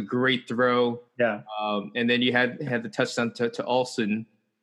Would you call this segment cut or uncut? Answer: cut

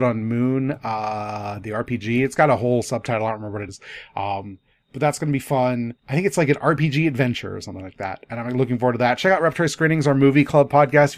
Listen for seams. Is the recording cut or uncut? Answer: cut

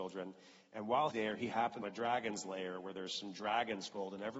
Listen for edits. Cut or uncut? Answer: cut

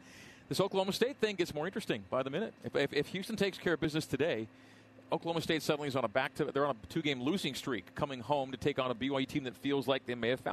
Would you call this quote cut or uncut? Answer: cut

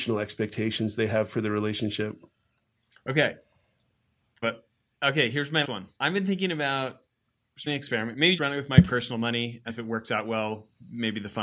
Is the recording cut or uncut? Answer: cut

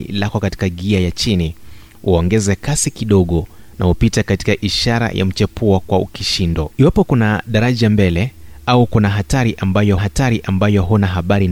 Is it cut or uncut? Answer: cut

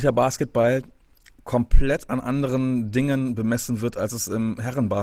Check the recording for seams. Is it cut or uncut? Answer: uncut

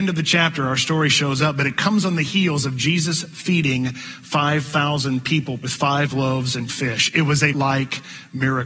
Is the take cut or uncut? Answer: cut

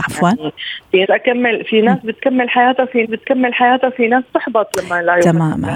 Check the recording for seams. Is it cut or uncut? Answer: cut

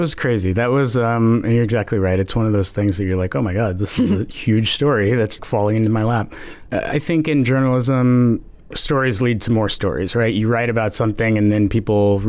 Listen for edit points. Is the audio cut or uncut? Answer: cut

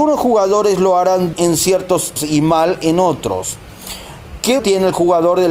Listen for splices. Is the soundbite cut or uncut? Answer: cut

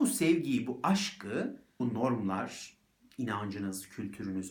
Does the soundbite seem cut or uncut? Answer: cut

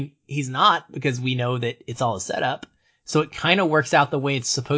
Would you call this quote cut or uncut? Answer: uncut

